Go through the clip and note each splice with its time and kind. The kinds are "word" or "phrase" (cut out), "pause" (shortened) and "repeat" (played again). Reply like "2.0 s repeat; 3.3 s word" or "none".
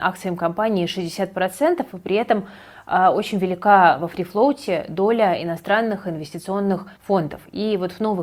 7.0 s pause